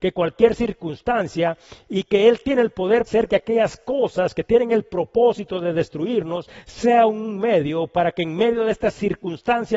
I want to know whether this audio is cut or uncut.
cut